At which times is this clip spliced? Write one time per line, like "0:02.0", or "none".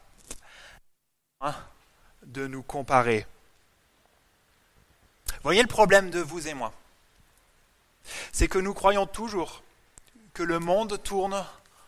none